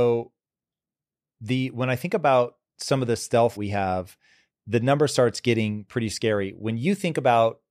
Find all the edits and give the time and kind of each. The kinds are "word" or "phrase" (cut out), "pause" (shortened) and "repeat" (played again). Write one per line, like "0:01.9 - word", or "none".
0:03.6 - phrase
0:04.5 - word